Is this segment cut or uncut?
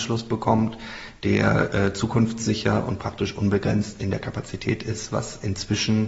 uncut